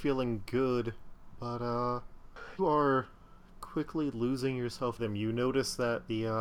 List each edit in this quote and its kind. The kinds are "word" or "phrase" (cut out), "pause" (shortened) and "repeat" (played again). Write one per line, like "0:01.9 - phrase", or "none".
0:02.6 - word
0:05.0 - word

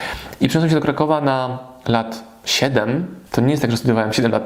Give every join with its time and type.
0:03.3 - pause

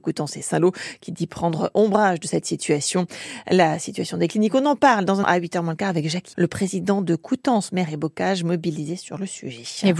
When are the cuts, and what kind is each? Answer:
0:05.2 - word
0:06.3 - word

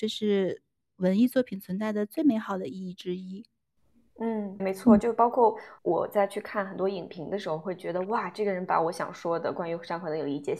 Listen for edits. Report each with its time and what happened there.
0:04.6 - word
0:05.8 - pause

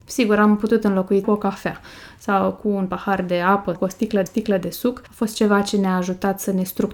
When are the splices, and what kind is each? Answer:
0:01.2 - word
0:03.7 - word
0:04.3 - repeat
0:05.1 - pause

